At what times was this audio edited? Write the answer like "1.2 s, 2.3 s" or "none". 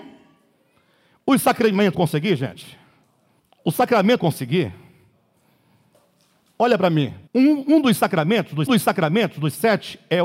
1.9 s, 3.4 s, 4.2 s, 7.3 s, 8.7 s